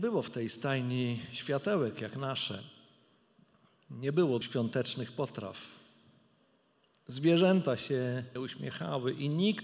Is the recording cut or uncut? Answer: cut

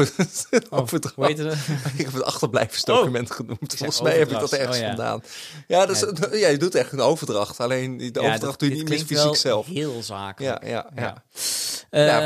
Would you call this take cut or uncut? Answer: uncut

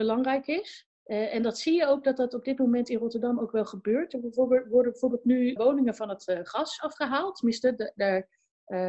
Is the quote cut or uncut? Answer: cut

